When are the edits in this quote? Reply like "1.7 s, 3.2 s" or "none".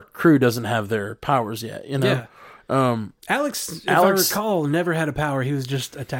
3.2 s